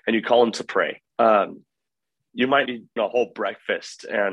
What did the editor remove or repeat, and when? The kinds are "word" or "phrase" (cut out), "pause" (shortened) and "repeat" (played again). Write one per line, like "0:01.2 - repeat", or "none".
0:01.1 - pause
0:02.7 - word
0:03.0 - word